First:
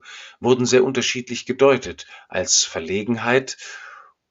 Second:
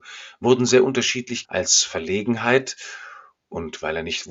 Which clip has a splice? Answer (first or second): second